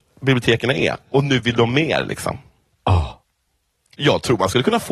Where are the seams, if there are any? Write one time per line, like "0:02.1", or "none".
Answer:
none